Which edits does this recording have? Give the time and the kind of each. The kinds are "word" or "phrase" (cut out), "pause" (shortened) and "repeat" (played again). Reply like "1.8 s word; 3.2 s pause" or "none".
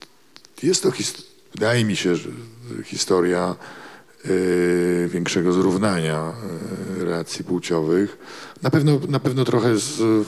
none